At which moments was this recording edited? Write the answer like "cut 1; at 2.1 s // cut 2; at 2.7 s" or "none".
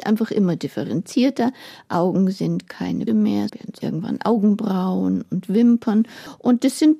cut 1; at 3.1 s // cut 2; at 3.5 s // cut 3; at 3.8 s